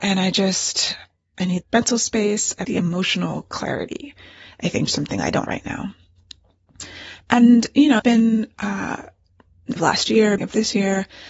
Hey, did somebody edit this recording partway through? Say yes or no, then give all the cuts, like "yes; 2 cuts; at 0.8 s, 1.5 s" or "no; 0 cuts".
yes; 7 cuts; at 1.6 s, 2.6 s, 4.9 s, 5.5 s, 8.0 s, 9.8 s, 10.4 s